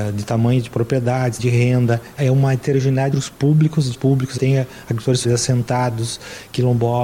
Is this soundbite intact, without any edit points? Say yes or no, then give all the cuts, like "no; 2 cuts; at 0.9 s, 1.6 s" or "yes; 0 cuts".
no; 6 cuts; at 1.4 s, 2.2 s, 3.1 s, 3.9 s, 4.4 s, 5.2 s